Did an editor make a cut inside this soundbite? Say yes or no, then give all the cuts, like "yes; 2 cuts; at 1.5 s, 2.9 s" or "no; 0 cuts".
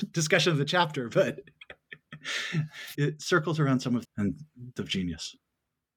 yes; 3 cuts; at 2.9 s, 4.0 s, 4.8 s